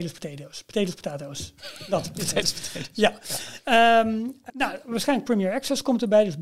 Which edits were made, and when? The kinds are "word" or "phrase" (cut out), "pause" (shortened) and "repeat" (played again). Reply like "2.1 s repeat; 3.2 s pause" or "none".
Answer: 4.5 s word